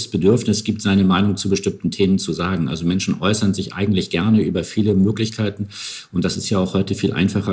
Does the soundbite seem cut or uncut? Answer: uncut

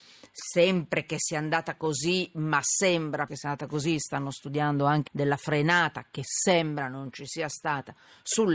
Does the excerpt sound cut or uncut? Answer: cut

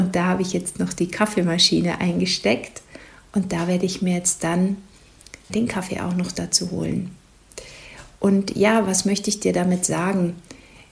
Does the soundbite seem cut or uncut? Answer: cut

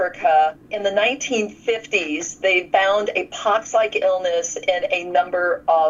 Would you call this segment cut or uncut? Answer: uncut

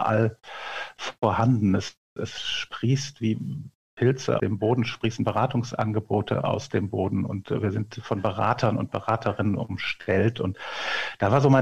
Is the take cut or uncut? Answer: cut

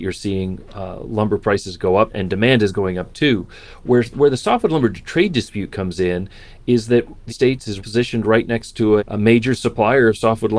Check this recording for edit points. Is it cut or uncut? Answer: cut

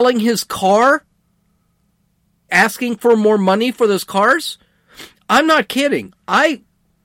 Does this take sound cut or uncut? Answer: cut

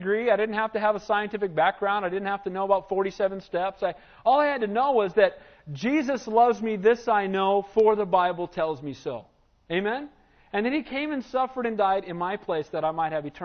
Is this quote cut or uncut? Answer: uncut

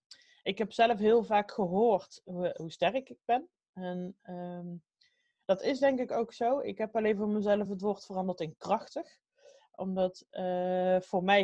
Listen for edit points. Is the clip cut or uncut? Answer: uncut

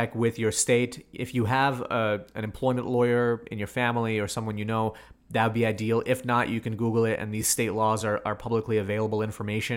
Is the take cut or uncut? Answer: uncut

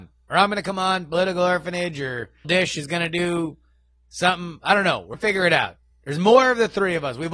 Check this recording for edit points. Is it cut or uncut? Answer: cut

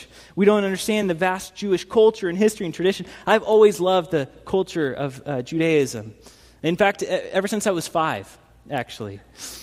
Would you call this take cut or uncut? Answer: uncut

